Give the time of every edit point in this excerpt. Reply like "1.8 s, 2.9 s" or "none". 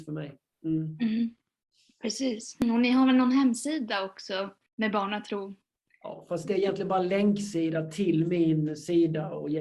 none

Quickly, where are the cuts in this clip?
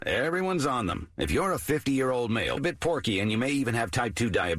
2.6 s

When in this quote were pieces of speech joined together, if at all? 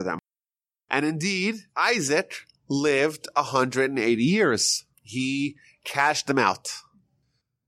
1.7 s, 4.9 s

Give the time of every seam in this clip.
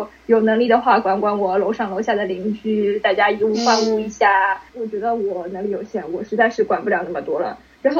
4.7 s

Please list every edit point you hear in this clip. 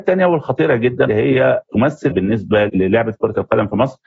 1.1 s, 2.1 s, 2.7 s

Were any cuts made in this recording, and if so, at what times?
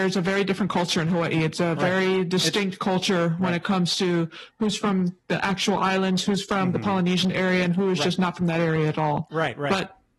none

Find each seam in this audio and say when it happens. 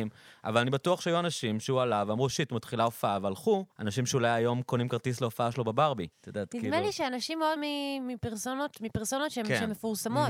3.7 s, 6.1 s, 7.6 s

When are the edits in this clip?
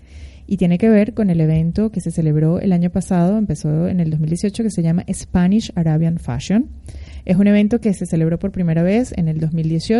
none

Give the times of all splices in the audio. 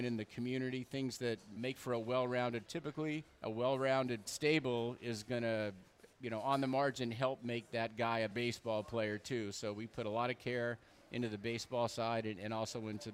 1.6 s, 2.7 s, 3.3 s, 4.2 s, 6.1 s, 8.3 s

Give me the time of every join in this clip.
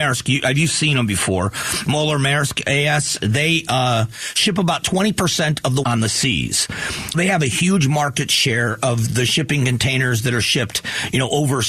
5.8 s, 7.1 s

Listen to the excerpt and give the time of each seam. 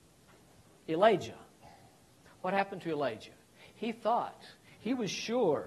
none

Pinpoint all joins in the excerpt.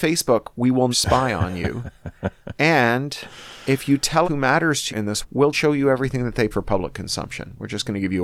0.9 s, 4.2 s, 4.9 s, 5.2 s, 5.5 s, 6.5 s

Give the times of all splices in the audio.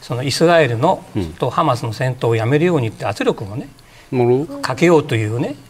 none

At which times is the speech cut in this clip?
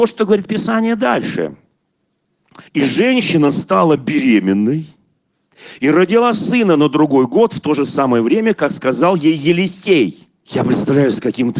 2.7 s, 10.4 s

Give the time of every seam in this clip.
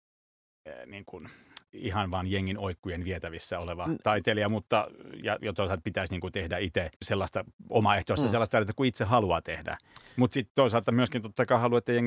1.7 s, 6.9 s

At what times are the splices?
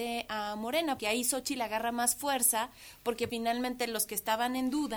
1.0 s, 3.3 s

